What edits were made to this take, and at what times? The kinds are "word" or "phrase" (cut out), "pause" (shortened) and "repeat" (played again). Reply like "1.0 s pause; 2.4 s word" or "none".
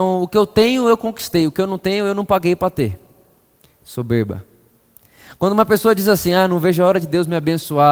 none

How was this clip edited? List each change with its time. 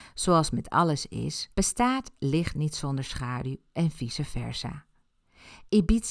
1.5 s pause

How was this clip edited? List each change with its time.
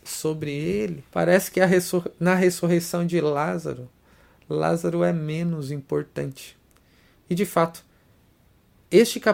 1.1 s pause

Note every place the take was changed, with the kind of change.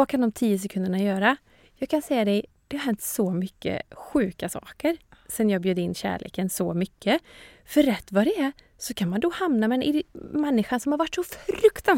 none

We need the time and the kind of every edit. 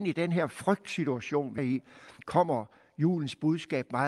1.6 s word

